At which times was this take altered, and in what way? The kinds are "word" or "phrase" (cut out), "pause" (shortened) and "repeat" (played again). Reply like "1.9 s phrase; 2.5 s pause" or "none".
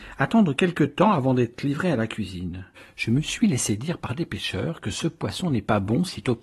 2.7 s pause